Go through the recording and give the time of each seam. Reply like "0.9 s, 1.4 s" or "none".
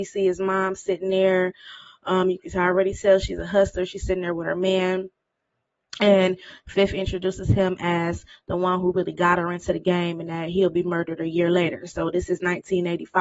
none